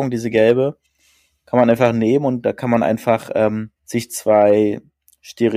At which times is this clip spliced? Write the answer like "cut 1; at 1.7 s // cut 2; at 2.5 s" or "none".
cut 1; at 3.8 s